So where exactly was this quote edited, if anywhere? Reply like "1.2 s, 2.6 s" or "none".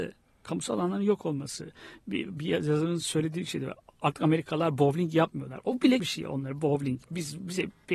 6.0 s